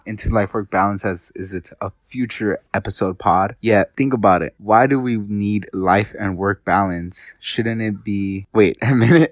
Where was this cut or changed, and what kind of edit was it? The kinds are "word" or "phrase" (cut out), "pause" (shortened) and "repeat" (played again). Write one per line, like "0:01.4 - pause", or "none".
0:02.7 - pause